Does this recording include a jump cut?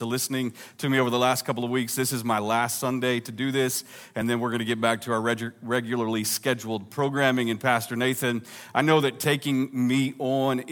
no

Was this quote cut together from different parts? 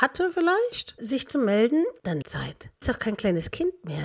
yes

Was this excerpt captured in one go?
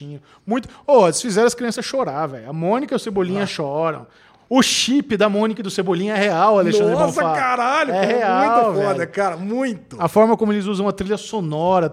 yes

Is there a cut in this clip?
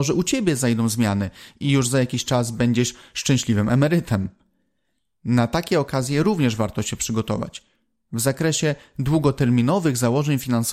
no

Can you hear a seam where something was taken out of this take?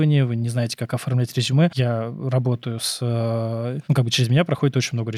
no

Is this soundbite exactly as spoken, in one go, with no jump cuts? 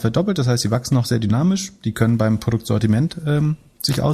yes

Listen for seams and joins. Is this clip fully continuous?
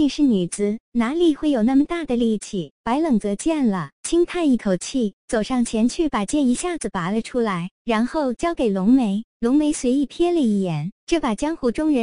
yes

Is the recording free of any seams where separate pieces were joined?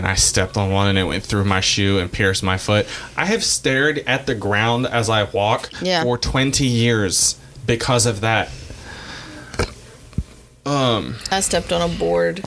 yes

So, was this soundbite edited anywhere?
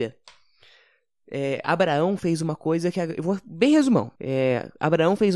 yes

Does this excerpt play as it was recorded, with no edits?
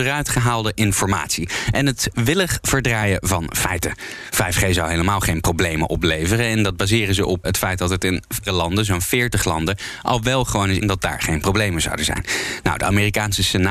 no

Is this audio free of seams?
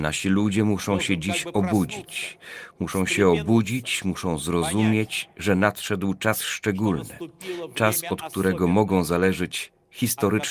yes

